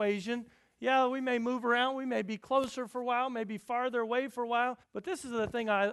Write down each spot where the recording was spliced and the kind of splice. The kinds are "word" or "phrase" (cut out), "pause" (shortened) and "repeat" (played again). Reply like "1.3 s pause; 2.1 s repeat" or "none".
4.8 s pause